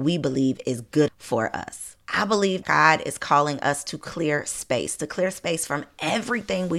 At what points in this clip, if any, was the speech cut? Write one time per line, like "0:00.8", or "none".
0:01.1
0:02.0
0:02.6